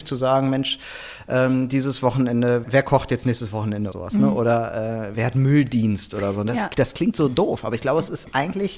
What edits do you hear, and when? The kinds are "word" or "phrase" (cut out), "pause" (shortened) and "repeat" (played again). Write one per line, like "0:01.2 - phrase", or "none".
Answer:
0:02.6 - word
0:03.9 - word
0:05.1 - word